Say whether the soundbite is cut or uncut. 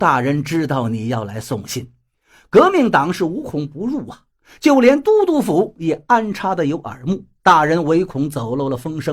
cut